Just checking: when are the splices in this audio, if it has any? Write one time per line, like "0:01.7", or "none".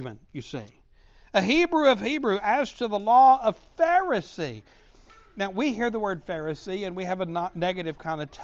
none